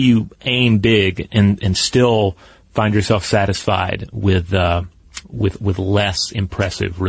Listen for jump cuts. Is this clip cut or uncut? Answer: uncut